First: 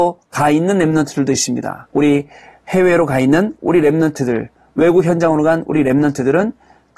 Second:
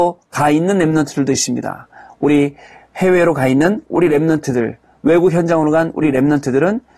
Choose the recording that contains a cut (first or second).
first